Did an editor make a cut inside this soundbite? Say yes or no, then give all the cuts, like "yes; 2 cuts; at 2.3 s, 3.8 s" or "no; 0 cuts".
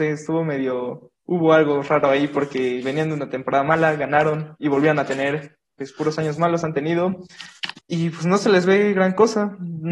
yes; 2 cuts; at 1.2 s, 7.8 s